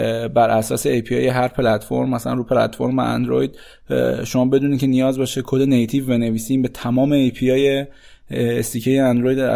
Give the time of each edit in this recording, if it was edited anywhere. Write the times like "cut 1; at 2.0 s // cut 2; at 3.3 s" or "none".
none